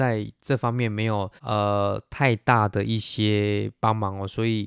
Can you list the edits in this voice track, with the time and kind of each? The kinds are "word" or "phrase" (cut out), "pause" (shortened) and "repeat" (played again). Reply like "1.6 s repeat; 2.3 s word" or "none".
1.4 s pause